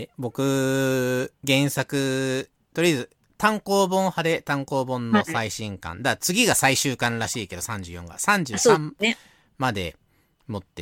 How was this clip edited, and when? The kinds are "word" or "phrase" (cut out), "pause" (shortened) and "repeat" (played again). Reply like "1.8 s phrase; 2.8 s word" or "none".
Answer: 1.4 s pause

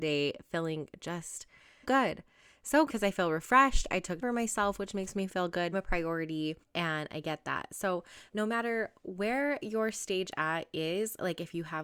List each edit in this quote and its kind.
1.8 s word; 2.9 s word; 4.2 s word; 5.7 s phrase; 6.6 s pause; 8.3 s pause

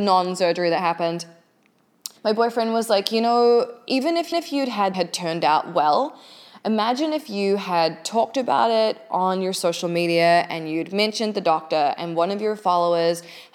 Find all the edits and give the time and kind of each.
2.2 s pause; 4.3 s repeat; 4.9 s phrase

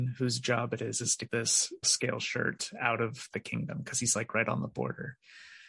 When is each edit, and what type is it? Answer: 1.3 s word; 1.8 s word

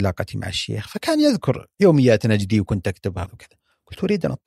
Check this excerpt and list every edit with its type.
3.3 s word

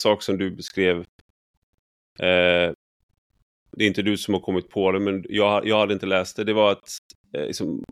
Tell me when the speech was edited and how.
none

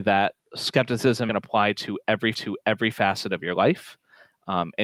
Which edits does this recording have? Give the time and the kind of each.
1.3 s phrase; 2.3 s repeat

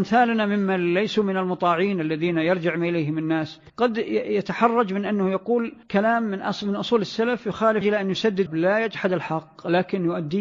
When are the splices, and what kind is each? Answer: 3.7 s pause; 5.8 s pause; 7.8 s phrase; 8.5 s word

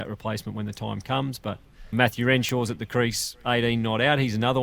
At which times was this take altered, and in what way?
1.9 s word

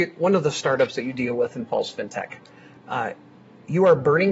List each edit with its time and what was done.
none

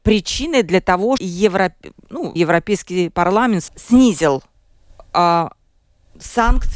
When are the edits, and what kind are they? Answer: 1.2 s word; 2.4 s word; 3.7 s word

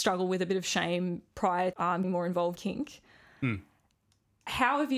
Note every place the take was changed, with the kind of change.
1.7 s word; 2.0 s word; 2.6 s word

